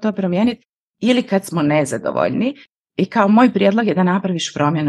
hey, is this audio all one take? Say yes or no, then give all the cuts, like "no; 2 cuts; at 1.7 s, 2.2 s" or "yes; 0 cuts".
yes; 0 cuts